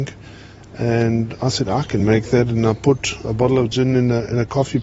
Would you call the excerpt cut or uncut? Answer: uncut